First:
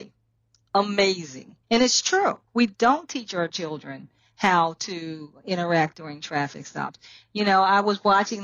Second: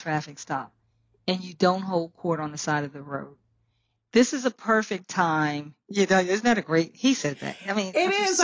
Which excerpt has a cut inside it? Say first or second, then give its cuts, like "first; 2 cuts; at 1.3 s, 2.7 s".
first; 2 cuts; at 1.6 s, 2.5 s